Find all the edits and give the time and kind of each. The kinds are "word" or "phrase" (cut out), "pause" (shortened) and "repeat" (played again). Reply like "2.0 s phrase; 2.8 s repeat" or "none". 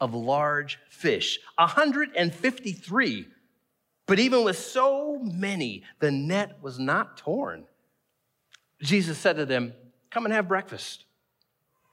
none